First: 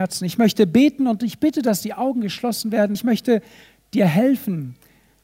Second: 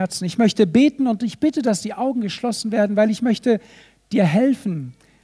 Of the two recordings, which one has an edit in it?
first; 1 cut; at 2.9 s

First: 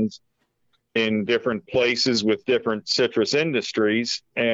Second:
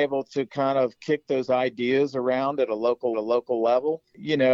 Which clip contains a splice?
second; 1 cut; at 3.1 s

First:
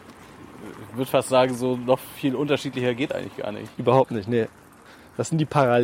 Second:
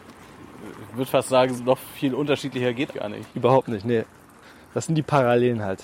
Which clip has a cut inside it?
second; 2 cuts; at 1.6 s, 2.9 s

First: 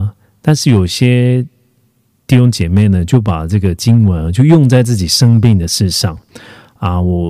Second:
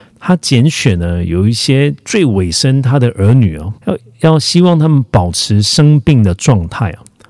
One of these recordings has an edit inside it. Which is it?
second; 1 cut; at 3.8 s

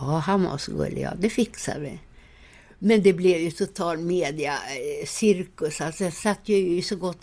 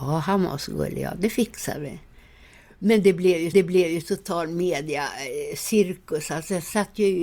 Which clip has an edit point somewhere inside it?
second; 1 cut; at 3.5 s

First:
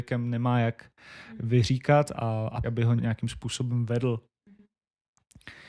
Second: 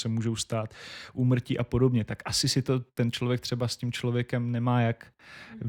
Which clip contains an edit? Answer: first; 3 cuts; at 2.1 s, 2.6 s, 3.0 s

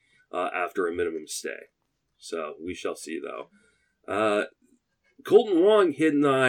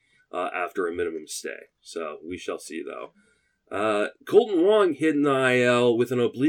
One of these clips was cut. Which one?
second; 2 cuts; at 1.7 s, 4.2 s

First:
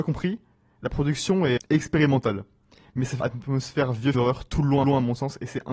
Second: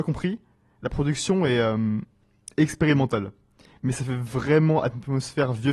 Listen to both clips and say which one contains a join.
first; 4 cuts; at 1.6 s, 3.2 s, 4.1 s, 4.8 s

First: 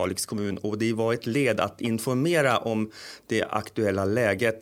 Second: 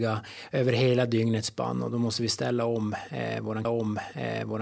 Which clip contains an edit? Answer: second; 1 cut; at 3.6 s

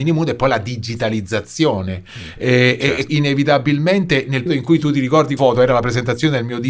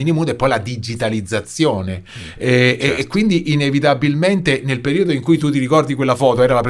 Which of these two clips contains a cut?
first; 3 cuts; at 3.1 s, 4.5 s, 5.4 s

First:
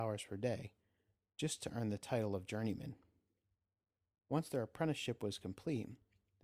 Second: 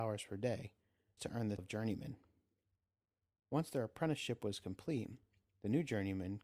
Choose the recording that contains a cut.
second; 2 cuts; at 1.2 s, 1.6 s

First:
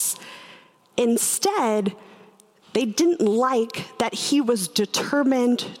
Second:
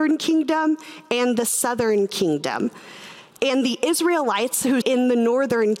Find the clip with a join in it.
second; 1 cut; at 4.8 s

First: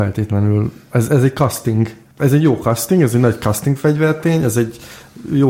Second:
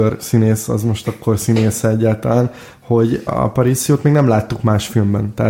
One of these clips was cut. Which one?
second; 1 cut; at 3.3 s

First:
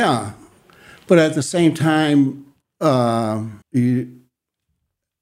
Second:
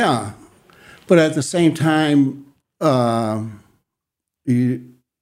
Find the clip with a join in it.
first; 1 cut; at 3.6 s

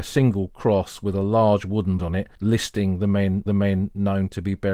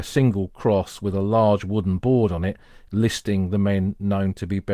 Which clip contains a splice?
first; 3 cuts; at 2.0 s, 2.4 s, 3.5 s

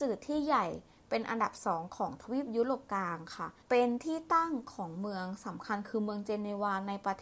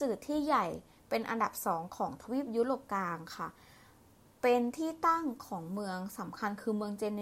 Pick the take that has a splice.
first; 1 cut; at 3.6 s

